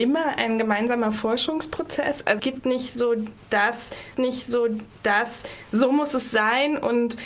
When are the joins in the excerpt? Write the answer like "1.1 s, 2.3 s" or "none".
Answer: 2.4 s, 4.1 s